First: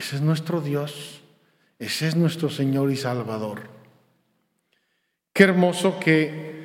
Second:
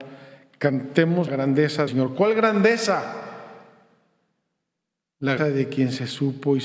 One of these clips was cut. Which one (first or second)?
second